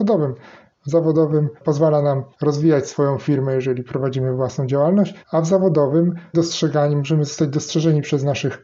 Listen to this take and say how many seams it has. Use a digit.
4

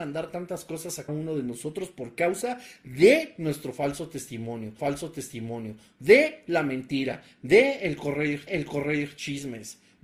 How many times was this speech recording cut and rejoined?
3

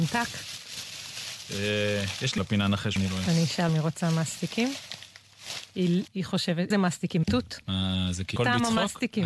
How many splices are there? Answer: 7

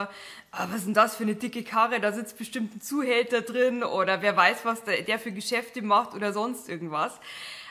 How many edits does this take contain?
0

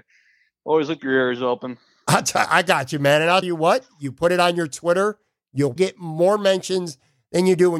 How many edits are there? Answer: 3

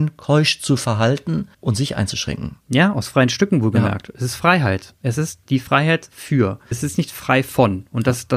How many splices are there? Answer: 4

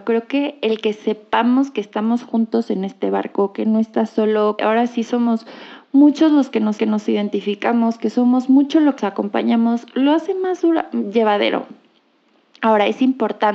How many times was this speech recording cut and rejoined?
3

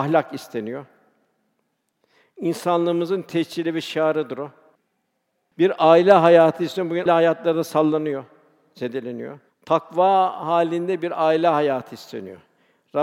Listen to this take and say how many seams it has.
2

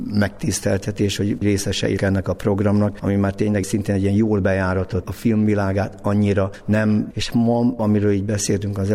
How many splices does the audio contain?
3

